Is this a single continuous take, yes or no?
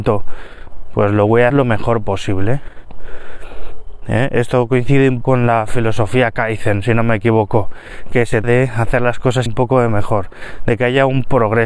no